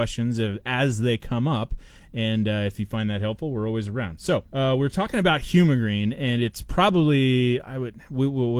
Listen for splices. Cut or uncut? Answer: cut